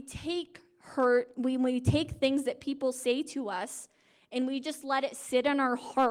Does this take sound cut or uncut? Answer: uncut